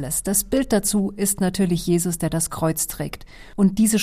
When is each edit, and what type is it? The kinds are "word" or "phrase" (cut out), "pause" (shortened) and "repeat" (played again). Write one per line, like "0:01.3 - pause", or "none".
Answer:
none